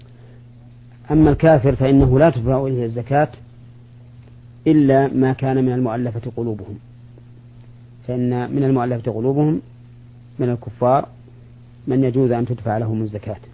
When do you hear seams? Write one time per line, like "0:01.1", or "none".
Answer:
none